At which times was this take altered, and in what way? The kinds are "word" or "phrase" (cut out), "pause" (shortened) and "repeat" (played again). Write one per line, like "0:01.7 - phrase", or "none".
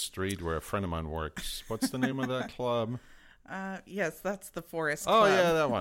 none